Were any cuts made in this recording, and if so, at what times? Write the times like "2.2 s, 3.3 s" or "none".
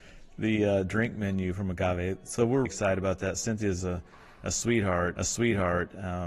2.7 s, 3.8 s, 5.2 s